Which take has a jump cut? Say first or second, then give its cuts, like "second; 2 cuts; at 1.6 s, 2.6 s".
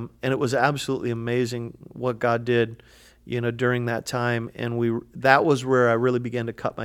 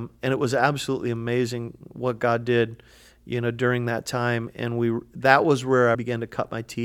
second; 1 cut; at 5.9 s